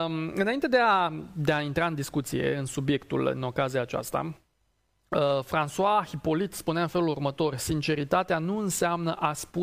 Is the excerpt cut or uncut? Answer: uncut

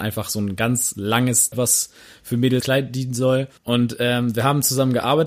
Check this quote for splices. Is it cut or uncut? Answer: cut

